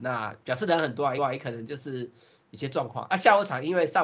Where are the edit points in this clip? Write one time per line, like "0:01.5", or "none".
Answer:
0:01.2